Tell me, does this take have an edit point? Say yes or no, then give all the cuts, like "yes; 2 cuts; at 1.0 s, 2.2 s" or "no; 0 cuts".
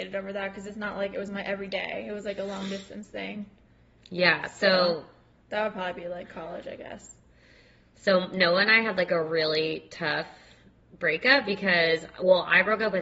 no; 0 cuts